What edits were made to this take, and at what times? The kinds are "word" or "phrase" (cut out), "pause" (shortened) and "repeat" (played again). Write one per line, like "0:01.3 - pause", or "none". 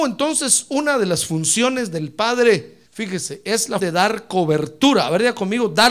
0:02.9 - pause
0:03.8 - word